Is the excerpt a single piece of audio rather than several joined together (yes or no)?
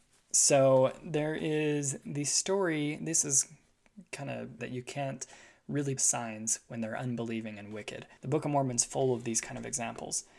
no